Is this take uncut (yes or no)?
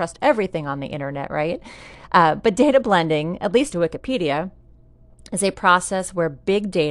no